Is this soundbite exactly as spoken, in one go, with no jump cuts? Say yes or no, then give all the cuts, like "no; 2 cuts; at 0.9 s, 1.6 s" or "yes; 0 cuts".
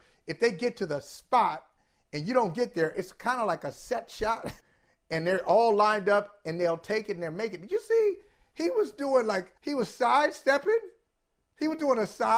no; 2 cuts; at 4.6 s, 9.6 s